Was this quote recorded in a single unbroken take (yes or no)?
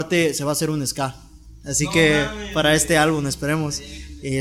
yes